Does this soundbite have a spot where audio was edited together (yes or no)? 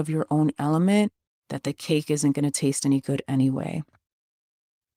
no